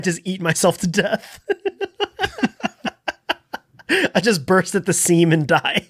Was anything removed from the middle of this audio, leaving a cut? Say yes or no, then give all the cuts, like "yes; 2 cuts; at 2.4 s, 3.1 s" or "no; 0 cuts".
no; 0 cuts